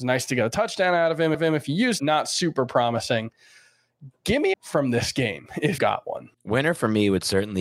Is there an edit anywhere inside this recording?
yes; 5 cuts; at 1.3 s, 2.0 s, 4.5 s, 5.8 s, 6.3 s

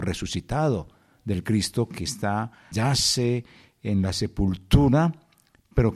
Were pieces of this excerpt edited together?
yes; 1 cut; at 2.7 s

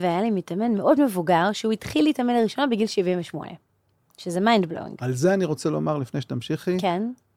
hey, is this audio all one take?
yes; 0 cuts

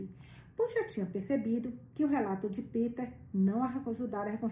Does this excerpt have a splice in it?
no; 0 cuts

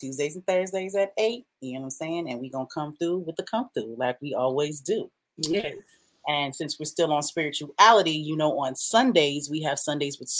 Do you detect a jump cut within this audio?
no; 0 cuts

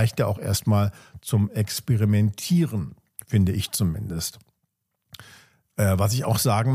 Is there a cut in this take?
no; 0 cuts

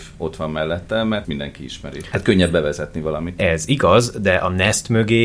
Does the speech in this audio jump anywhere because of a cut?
yes; 1 cut; at 1.2 s

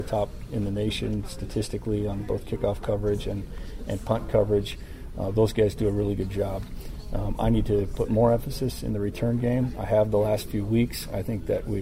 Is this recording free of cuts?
yes; 0 cuts

